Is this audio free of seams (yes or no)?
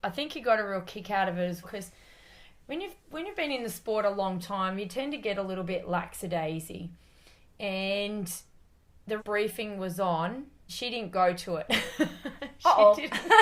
no